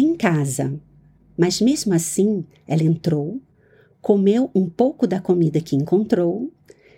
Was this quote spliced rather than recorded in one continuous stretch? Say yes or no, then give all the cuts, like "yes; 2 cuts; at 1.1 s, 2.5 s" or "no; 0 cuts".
no; 0 cuts